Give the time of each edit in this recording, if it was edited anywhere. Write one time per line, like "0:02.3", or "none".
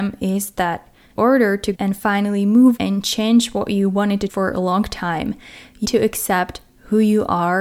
0:01.2
0:01.7
0:02.8
0:04.3
0:05.8